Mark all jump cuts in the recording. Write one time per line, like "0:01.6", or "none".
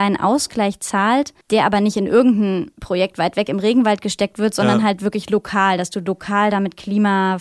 0:01.4